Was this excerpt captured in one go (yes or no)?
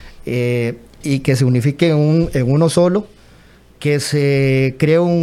yes